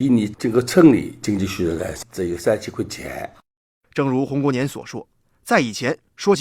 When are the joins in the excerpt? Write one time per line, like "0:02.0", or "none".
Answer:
none